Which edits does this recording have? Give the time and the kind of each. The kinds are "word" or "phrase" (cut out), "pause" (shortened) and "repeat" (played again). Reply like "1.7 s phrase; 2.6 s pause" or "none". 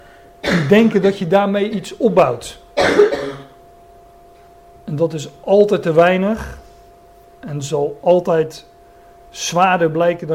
none